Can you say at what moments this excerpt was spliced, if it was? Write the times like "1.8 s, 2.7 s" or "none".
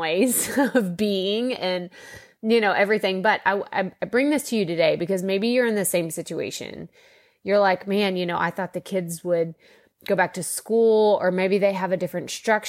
none